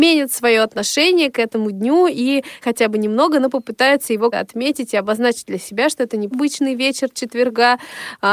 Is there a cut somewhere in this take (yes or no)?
yes